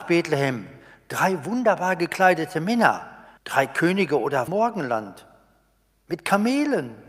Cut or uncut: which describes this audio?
cut